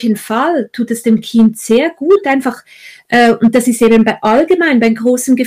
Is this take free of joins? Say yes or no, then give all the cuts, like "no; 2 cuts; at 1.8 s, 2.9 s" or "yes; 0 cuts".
yes; 0 cuts